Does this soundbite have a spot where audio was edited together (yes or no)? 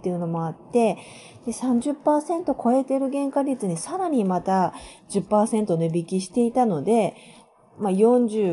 no